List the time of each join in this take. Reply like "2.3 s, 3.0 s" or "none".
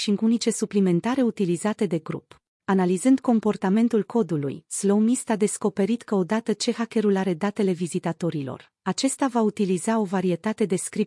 2.6 s